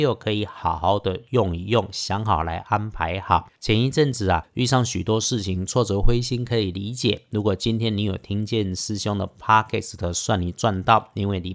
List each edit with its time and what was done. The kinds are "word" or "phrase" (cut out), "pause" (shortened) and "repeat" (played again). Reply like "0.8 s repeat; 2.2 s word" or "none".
3.6 s pause